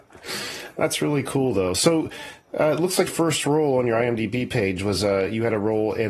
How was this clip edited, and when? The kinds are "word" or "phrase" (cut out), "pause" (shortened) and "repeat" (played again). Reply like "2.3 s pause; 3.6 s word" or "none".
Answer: 3.1 s word